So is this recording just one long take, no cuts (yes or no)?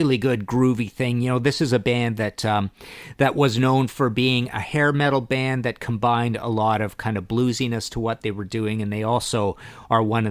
yes